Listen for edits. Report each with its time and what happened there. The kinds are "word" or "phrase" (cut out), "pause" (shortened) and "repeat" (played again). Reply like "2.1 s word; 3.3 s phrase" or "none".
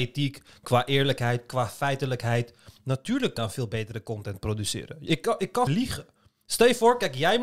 3.4 s word; 5.7 s word